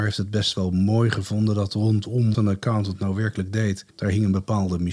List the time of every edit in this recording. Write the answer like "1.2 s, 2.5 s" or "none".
2.3 s, 3.9 s